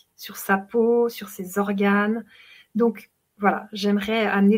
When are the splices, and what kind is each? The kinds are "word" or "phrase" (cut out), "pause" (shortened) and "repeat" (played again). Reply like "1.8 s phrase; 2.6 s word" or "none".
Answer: none

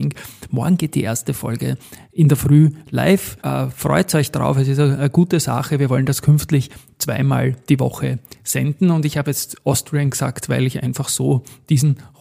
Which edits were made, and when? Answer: 3.4 s pause

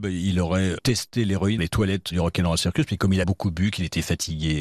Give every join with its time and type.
1.6 s word; 2.1 s word; 3.2 s word

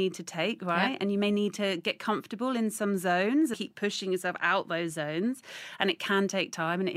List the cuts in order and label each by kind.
3.5 s word

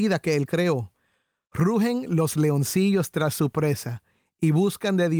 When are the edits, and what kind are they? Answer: none

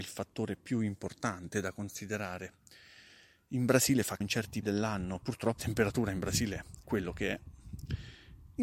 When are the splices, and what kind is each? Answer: 4.2 s word; 4.6 s word; 5.6 s word; 6.8 s word

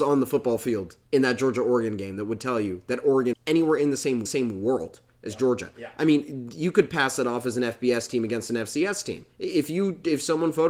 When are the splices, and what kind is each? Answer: 1.0 s pause; 3.3 s word; 4.3 s repeat; 9.3 s pause

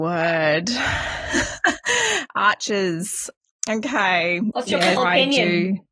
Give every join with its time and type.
5.0 s word

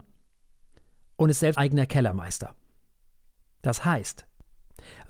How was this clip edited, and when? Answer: 1.5 s word

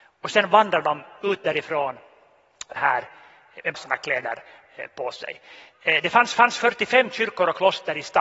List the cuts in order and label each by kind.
2.8 s phrase; 3.7 s word; 6.3 s repeat

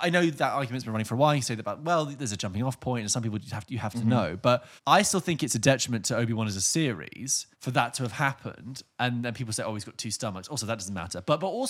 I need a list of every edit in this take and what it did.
4.8 s pause; 7.5 s pause

